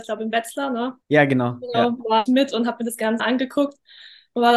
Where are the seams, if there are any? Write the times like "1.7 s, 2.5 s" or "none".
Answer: 1.0 s, 2.3 s, 3.2 s